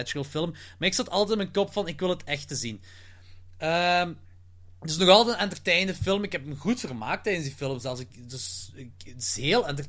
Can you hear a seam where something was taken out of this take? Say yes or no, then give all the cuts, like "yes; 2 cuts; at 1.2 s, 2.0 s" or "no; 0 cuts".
no; 0 cuts